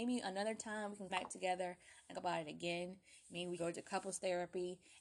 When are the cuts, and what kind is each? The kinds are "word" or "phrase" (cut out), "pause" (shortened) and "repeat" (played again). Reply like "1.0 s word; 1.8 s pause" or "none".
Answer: 1.1 s word; 2.1 s word; 3.6 s word